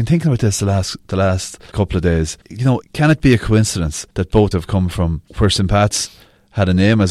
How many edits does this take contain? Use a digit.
6